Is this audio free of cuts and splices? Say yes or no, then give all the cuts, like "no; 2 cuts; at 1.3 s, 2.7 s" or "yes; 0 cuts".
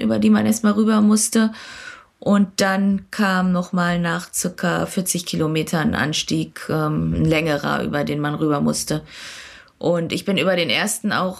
yes; 0 cuts